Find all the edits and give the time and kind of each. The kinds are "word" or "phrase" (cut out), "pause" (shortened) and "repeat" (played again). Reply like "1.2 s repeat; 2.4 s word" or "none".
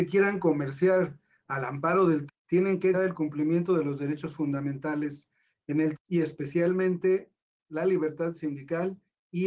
2.3 s word; 2.9 s word; 6.0 s word